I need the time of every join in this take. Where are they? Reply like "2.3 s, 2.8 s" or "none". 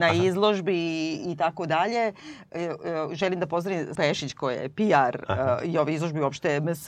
4.0 s